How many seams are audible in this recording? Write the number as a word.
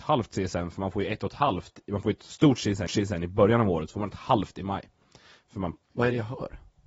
two